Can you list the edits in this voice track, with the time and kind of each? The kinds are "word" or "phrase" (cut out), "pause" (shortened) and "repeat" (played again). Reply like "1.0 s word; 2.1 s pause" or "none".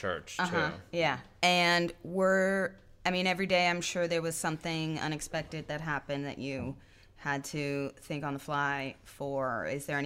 none